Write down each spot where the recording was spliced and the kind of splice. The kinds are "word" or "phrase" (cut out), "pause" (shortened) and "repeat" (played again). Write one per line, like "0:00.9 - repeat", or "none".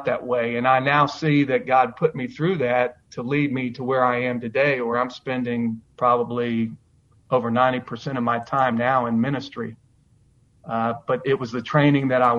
none